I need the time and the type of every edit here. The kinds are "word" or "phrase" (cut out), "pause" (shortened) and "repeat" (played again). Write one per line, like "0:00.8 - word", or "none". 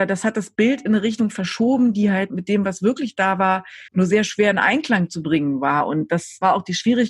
0:03.9 - pause